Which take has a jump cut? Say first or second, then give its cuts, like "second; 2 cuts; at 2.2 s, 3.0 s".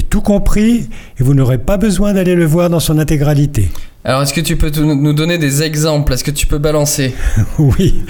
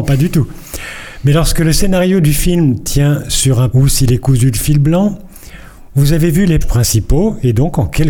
second; 2 cuts; at 3.7 s, 6.6 s